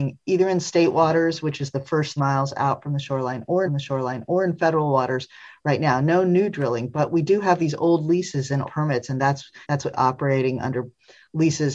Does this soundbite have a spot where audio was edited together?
yes; 5 cuts; at 2.2 s, 3.7 s, 8.7 s, 9.6 s, 9.9 s

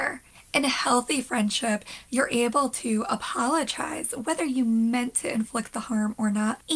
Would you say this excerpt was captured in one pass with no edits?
yes; 0 cuts

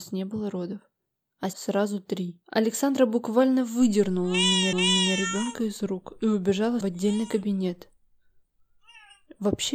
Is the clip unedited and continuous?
no; 4 cuts; at 1.5 s, 2.4 s, 4.7 s, 6.8 s

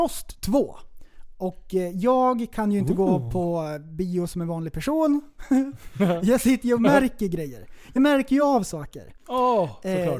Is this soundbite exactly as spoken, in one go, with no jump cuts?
yes; 0 cuts

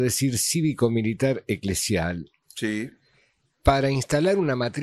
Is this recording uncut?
yes; 0 cuts

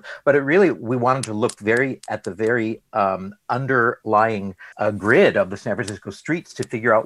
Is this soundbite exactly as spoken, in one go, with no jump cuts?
no; 1 cut; at 4.7 s

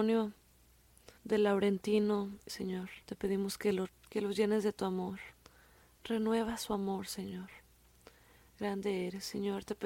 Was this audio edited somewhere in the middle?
yes; 5 cuts; at 1.2 s, 2.5 s, 3.0 s, 3.9 s, 5.4 s

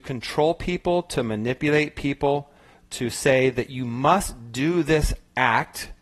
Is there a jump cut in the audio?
no; 0 cuts

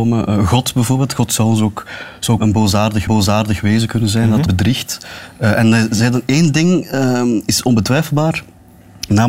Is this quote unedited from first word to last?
no; 3 cuts; at 2.4 s, 3.1 s, 4.5 s

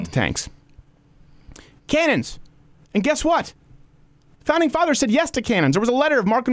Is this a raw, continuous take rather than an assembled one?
yes; 0 cuts

